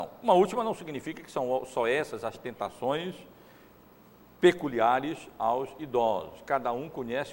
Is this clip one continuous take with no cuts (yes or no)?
yes